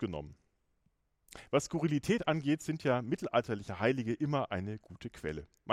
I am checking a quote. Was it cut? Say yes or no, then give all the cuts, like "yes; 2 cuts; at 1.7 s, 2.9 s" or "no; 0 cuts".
no; 0 cuts